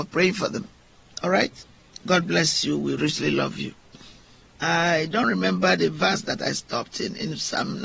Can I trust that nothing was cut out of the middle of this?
no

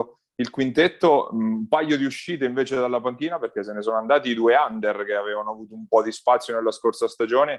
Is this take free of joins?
yes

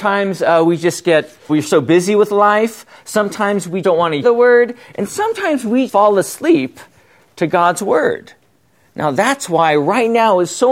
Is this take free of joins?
no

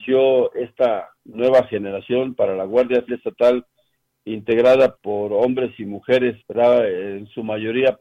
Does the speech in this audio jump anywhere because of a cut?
yes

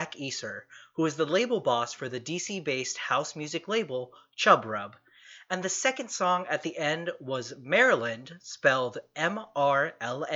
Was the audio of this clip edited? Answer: no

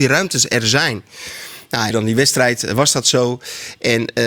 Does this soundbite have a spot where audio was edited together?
yes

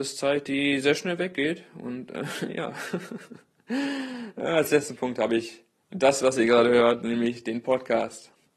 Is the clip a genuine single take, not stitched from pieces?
yes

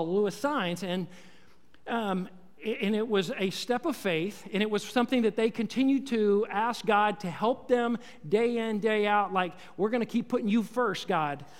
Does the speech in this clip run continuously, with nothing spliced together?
yes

